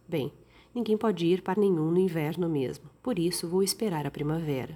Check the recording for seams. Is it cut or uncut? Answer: cut